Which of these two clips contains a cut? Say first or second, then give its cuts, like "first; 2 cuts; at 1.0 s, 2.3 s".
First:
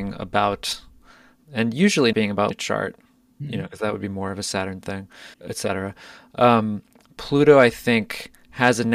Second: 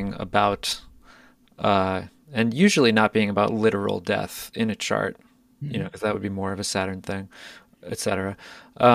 first; 4 cuts; at 1.4 s, 2.1 s, 2.5 s, 5.3 s